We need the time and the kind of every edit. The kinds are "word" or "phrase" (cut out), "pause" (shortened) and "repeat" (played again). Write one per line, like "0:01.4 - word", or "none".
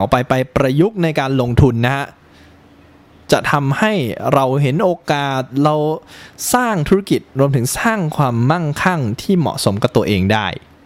0:03.1 - phrase

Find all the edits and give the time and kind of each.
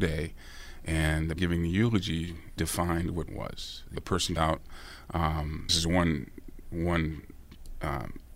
0:01.4 - word
0:02.6 - word
0:03.3 - word
0:03.9 - word
0:04.4 - word
0:05.7 - word

